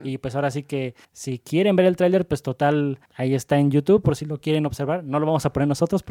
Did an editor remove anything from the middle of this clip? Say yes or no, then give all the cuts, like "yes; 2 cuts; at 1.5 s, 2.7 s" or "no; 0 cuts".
yes; 2 cuts; at 1.0 s, 3.1 s